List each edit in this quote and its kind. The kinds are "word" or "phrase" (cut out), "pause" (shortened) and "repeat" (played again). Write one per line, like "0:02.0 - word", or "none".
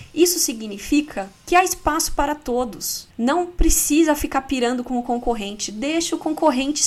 0:01.4 - pause
0:03.1 - pause